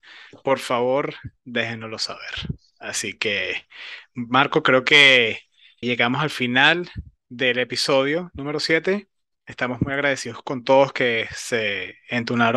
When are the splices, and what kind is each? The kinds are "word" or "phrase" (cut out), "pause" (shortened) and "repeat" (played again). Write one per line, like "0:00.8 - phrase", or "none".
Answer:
0:05.8 - word